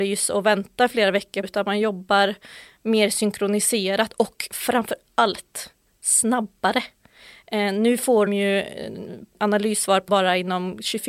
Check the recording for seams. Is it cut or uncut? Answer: cut